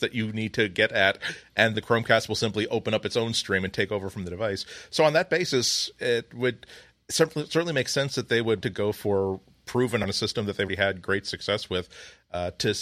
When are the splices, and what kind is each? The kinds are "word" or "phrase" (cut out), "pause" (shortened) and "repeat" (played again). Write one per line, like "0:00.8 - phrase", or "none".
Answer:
0:01.7 - word
0:08.6 - word
0:10.0 - word
0:10.7 - word